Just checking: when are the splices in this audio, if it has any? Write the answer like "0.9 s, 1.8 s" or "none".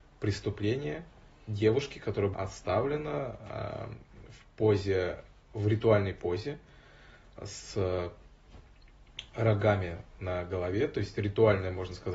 2.3 s